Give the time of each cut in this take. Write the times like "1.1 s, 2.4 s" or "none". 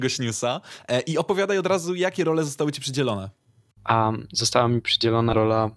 none